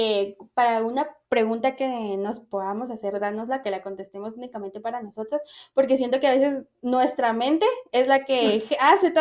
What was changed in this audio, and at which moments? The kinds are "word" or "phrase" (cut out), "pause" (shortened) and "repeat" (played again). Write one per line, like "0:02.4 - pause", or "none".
0:01.2 - pause
0:03.1 - word
0:03.6 - phrase